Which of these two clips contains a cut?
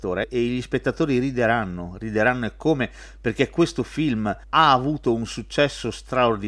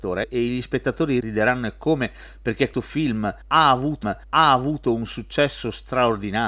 second; 3 cuts; at 1.2 s, 2.7 s, 4.0 s

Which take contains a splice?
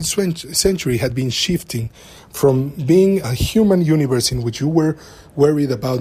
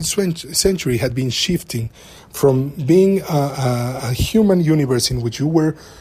first; 1 cut; at 3.2 s

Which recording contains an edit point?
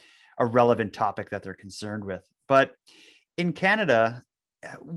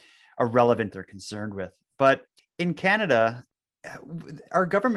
second; 2 cuts; at 0.9 s, 2.4 s

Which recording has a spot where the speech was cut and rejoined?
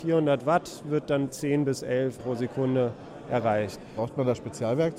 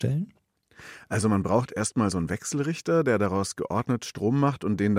first; 2 cuts; at 1.3 s, 2.2 s

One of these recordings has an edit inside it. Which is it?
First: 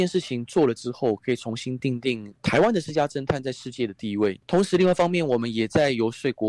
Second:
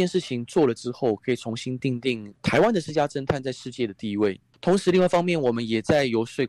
first; 1 cut; at 4.4 s

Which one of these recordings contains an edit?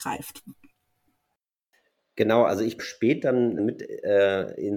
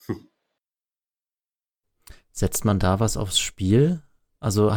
first; 2 cuts; at 2.8 s, 3.6 s

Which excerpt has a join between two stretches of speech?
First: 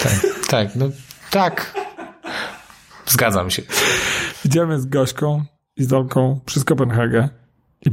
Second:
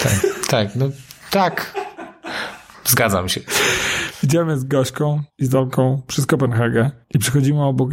second; 3 cuts; at 2.7 s, 5.3 s, 7.0 s

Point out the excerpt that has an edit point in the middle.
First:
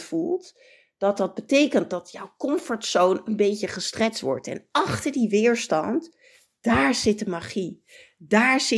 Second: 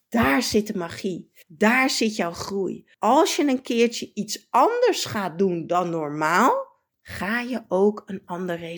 second; 3 cuts; at 1.4 s, 2.9 s, 6.9 s

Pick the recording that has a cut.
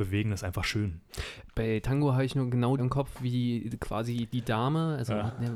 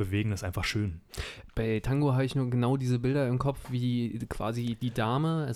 first; 1 cut; at 2.8 s

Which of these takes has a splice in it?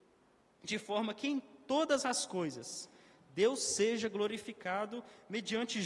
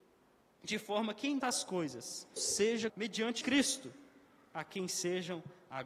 second; 4 cuts; at 1.4 s, 2.4 s, 2.9 s, 3.4 s

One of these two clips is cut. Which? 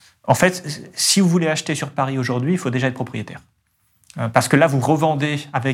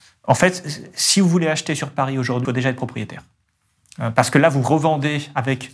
second; 1 cut; at 2.4 s

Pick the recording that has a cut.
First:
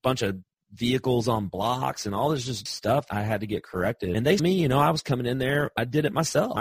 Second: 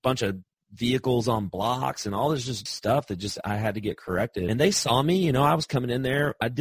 first; 2 cuts; at 3.1 s, 4.4 s

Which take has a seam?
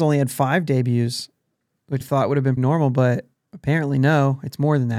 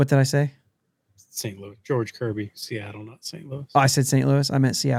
first; 3 cuts; at 2.0 s, 2.6 s, 3.3 s

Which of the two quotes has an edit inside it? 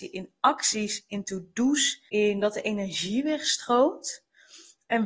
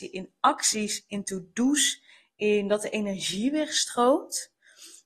first; 1 cut; at 2.1 s

